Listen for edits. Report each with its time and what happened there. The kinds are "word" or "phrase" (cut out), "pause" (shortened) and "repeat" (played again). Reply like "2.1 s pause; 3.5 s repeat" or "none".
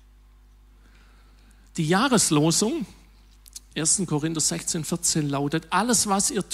3.7 s word; 4.8 s word